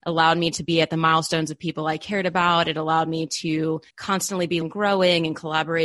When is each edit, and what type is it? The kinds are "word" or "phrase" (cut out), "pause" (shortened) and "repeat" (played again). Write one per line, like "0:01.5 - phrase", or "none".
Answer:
0:03.9 - pause
0:04.6 - word